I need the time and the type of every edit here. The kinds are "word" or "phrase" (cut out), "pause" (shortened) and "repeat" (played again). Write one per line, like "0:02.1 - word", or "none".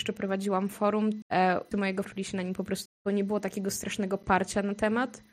0:01.2 - word
0:01.7 - word
0:02.0 - word
0:02.9 - word